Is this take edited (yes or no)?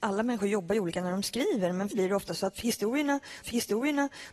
yes